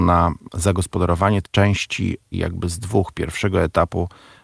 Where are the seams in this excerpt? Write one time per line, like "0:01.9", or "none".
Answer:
0:01.4
0:02.3